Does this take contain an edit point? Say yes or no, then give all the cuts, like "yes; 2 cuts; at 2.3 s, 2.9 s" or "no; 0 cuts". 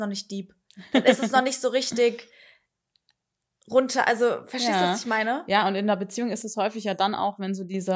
no; 0 cuts